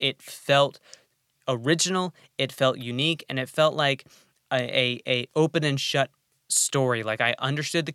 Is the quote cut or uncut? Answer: uncut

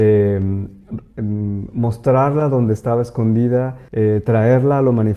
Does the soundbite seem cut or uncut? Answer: cut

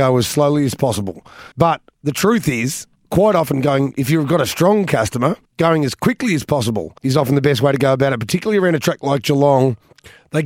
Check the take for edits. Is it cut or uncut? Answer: cut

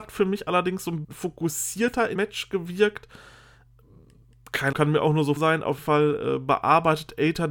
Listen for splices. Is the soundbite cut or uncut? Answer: cut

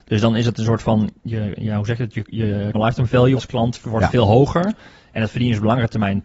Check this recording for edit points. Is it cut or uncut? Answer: cut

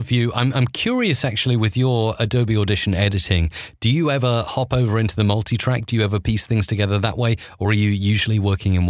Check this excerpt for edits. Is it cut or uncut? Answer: uncut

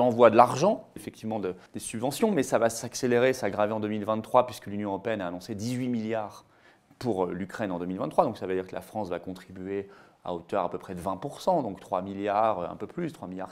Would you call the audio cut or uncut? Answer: cut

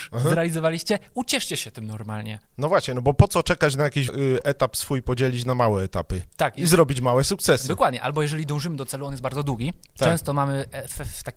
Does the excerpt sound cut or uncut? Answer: cut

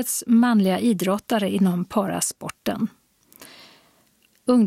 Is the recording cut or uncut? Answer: uncut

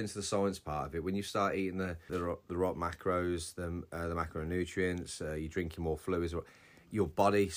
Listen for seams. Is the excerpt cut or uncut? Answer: cut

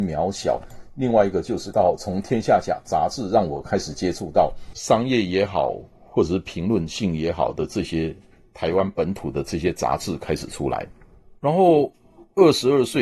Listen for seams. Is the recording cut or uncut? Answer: cut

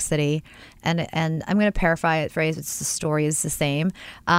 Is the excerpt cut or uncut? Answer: uncut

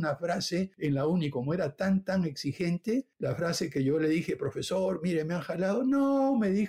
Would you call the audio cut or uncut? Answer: uncut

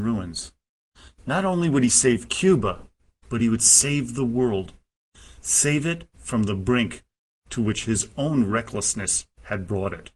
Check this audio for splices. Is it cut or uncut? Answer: uncut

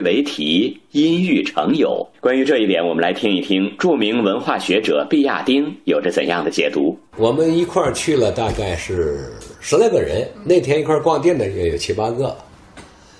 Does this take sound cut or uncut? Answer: cut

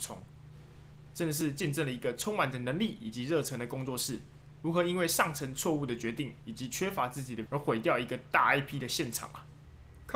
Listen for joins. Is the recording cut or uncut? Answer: cut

